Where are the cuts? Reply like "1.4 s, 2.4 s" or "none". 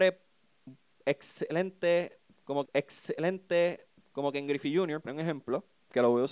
2.6 s, 5.1 s